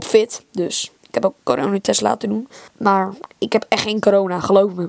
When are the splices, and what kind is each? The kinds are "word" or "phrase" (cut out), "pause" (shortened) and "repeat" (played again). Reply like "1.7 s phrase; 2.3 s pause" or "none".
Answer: 1.0 s pause; 2.7 s pause

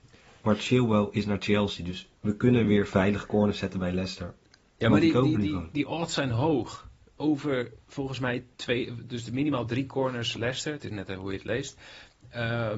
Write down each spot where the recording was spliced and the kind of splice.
none

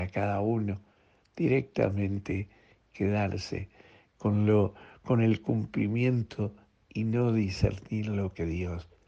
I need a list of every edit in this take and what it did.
none

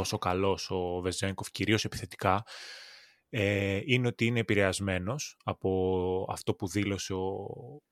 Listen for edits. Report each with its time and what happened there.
none

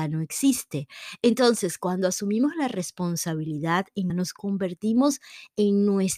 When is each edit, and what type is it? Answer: 4.1 s phrase

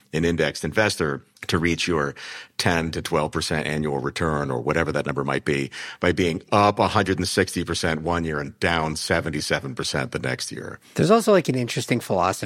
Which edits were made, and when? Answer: 1.4 s pause

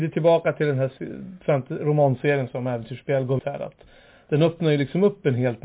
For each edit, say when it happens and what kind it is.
3.4 s word

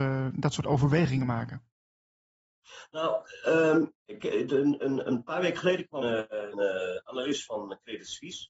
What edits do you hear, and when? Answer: 4.0 s pause; 6.0 s word; 6.5 s word

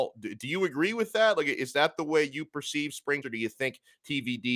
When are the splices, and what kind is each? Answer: 3.2 s word

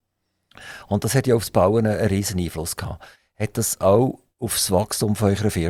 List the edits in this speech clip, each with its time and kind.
none

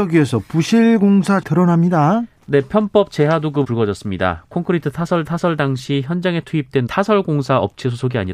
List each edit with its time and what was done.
1.4 s word; 3.6 s word; 5.2 s repeat; 6.9 s word

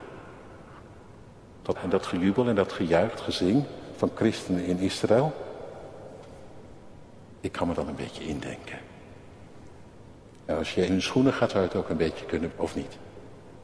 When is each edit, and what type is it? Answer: 1.7 s word; 3.1 s word; 7.7 s word; 10.9 s word; 11.5 s word; 12.5 s word

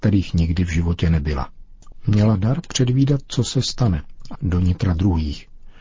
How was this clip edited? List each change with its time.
4.3 s word

